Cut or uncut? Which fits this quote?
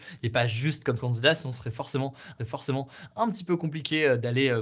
cut